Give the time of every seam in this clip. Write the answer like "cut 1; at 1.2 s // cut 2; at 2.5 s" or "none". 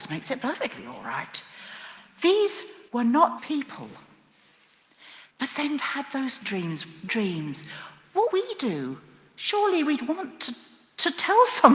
cut 1; at 2.9 s // cut 2; at 3.4 s // cut 3; at 5.3 s // cut 4; at 5.8 s // cut 5; at 6.4 s // cut 6; at 7.1 s // cut 7; at 8.3 s